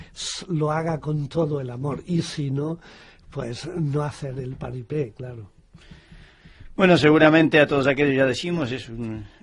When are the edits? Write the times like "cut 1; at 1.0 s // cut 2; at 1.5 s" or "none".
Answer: none